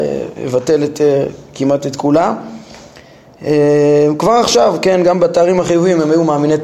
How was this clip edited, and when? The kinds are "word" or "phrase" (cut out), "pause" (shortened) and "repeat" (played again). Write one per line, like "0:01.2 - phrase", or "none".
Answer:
none